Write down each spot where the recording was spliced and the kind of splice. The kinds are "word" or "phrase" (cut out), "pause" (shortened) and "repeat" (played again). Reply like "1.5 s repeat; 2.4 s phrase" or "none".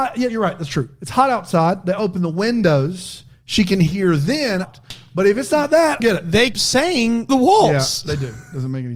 4.6 s phrase; 6.0 s phrase; 6.5 s word; 7.3 s phrase